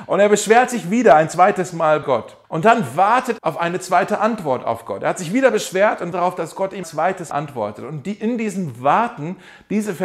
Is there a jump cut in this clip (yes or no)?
yes